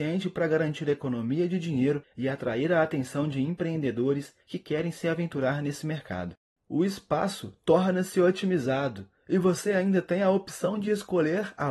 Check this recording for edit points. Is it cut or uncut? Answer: uncut